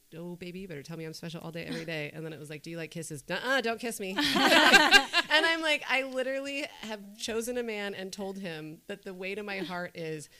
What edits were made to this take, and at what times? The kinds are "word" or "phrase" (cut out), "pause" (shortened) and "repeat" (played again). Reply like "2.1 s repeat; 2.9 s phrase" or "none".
none